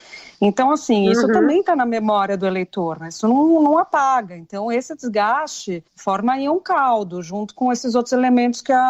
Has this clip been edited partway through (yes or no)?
yes